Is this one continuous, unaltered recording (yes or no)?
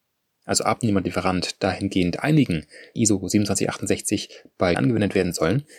no